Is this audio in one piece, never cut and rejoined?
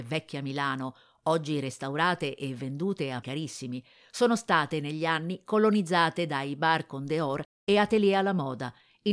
no; 1 cut; at 3.2 s

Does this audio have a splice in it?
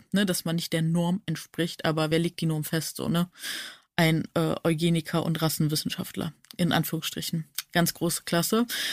no; 0 cuts

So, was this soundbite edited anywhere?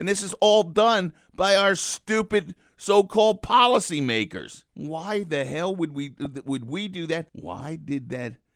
yes; 2 cuts; at 4.7 s, 7.3 s

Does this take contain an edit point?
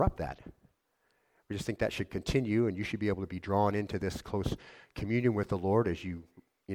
no; 0 cuts

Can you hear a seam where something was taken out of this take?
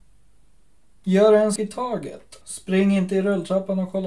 yes; 2 cuts; at 1.6 s, 2.4 s

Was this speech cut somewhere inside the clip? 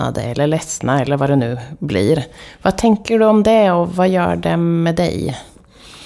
no; 0 cuts

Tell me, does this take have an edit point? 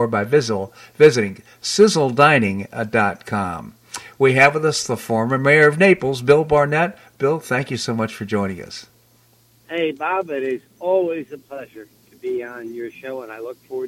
no; 0 cuts

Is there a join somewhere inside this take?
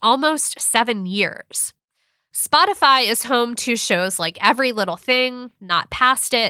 no; 0 cuts

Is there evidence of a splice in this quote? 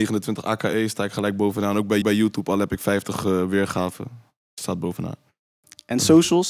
yes; 1 cut; at 2.0 s

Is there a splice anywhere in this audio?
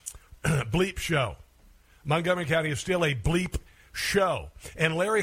no; 0 cuts

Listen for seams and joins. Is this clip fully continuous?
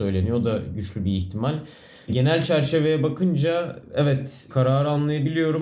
yes; 0 cuts

